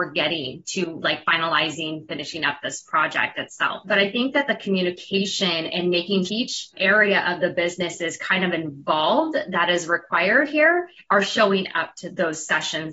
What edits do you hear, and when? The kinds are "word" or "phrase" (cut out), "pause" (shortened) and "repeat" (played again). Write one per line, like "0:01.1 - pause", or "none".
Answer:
0:06.3 - phrase